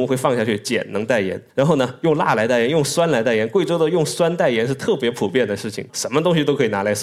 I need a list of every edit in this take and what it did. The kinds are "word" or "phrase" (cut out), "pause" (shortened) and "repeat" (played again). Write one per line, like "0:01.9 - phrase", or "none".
0:01.5 - pause
0:05.9 - phrase